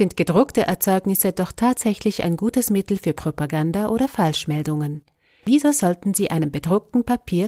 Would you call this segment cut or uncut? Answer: uncut